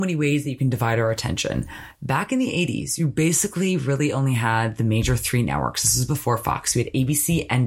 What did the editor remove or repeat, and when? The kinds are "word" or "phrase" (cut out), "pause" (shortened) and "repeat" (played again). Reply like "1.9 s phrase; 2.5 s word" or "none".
none